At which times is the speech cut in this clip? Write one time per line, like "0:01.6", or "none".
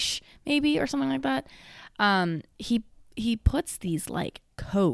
none